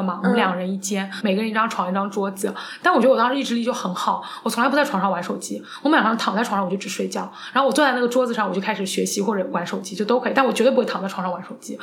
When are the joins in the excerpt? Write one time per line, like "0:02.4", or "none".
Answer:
0:01.2